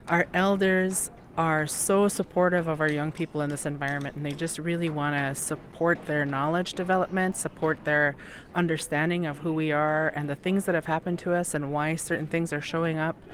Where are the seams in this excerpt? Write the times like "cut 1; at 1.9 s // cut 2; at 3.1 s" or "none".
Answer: cut 1; at 1.3 s